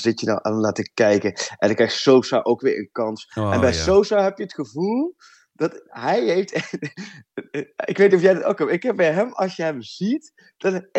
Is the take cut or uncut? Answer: uncut